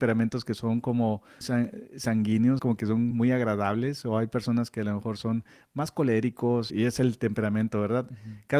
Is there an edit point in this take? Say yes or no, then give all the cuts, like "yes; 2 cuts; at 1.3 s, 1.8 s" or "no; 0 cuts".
yes; 4 cuts; at 1.4 s, 2.6 s, 3.1 s, 6.7 s